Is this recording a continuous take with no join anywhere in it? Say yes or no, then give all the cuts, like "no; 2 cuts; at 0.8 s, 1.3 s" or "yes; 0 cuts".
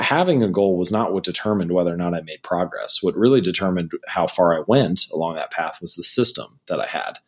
yes; 0 cuts